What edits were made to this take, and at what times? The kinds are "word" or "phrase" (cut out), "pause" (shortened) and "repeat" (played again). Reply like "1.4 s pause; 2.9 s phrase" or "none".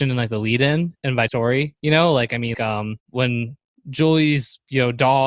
1.3 s phrase; 2.5 s word; 3.0 s pause

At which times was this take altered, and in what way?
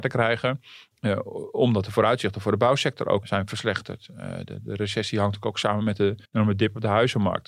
3.2 s word; 6.2 s pause

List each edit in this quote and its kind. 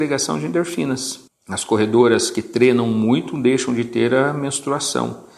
1.3 s pause

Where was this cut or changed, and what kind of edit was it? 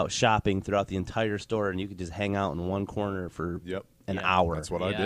none

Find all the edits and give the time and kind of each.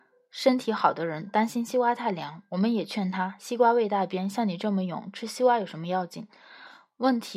none

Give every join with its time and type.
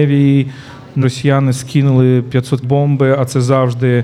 1.0 s word; 2.6 s word

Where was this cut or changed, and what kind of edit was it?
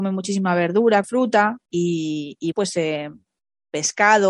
1.0 s word; 1.7 s pause; 2.5 s word

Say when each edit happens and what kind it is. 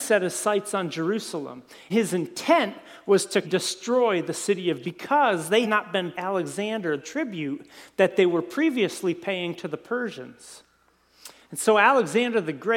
1.9 s word; 3.4 s word; 4.8 s word; 5.6 s word; 6.1 s word; 7.0 s word

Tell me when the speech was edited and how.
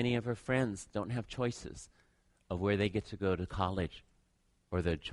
none

